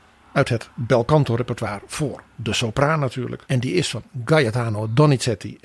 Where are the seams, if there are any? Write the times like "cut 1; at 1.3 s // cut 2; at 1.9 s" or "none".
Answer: cut 1; at 3.4 s

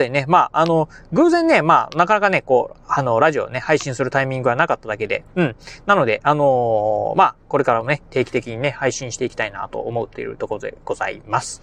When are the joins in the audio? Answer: none

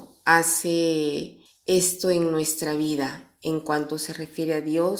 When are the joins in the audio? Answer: cut 1; at 1.5 s

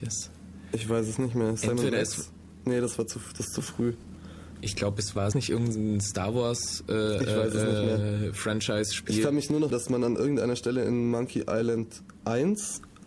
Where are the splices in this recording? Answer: cut 1; at 5.3 s // cut 2; at 9.7 s

